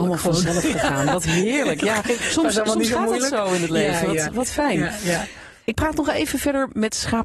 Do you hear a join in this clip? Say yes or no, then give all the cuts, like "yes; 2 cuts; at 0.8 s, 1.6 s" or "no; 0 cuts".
no; 0 cuts